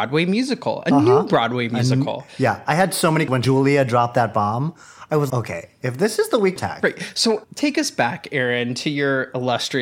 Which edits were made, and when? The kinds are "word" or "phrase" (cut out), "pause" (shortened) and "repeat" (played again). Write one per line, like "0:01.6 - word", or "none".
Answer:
0:03.3 - word
0:05.3 - word
0:06.6 - word
0:07.4 - word